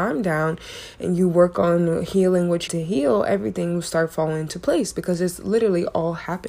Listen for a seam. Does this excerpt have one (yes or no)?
yes